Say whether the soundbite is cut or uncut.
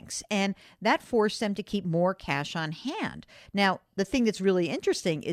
uncut